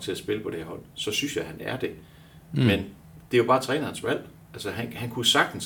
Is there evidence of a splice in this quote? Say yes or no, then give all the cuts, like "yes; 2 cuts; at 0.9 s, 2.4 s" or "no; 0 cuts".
no; 0 cuts